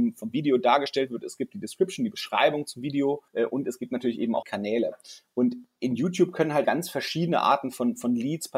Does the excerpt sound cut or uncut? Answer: cut